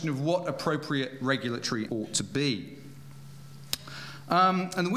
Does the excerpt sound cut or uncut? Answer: cut